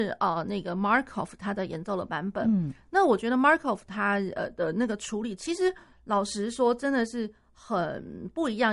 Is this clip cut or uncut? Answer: uncut